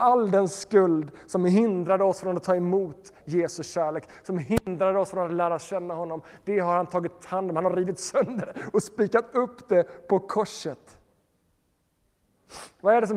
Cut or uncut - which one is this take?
uncut